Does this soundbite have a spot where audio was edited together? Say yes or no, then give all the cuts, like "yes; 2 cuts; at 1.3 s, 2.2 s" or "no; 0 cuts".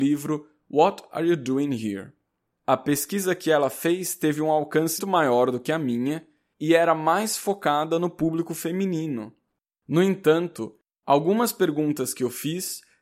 yes; 1 cut; at 5.0 s